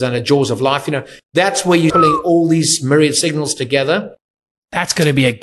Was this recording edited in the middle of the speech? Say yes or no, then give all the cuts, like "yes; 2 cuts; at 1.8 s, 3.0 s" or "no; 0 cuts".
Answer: yes; 1 cut; at 1.9 s